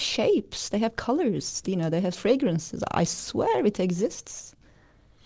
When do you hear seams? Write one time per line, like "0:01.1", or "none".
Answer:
0:01.6
0:02.1